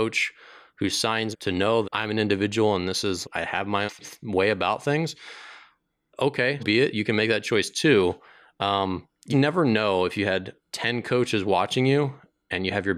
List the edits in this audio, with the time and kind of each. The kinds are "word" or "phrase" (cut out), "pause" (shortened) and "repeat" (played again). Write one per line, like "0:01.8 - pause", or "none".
0:01.3 - word
0:01.8 - word
0:03.2 - word
0:03.9 - word
0:06.6 - word
0:09.3 - word